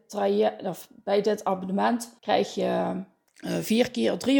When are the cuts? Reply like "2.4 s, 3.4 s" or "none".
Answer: 2.2 s, 3.3 s